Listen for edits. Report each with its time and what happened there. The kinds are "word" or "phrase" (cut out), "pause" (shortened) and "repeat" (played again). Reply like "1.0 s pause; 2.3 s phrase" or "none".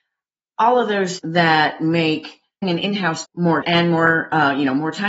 1.2 s word; 2.6 s word; 3.2 s word; 3.6 s word

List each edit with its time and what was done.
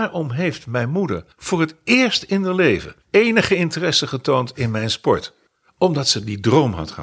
1.3 s pause; 3.0 s pause; 5.5 s pause

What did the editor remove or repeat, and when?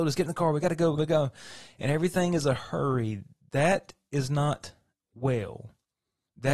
1.0 s phrase

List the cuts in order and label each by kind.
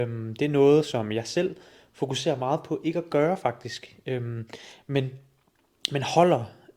none

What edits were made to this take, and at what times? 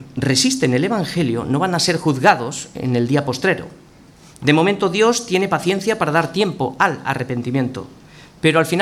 none

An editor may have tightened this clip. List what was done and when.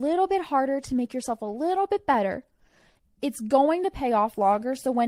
none

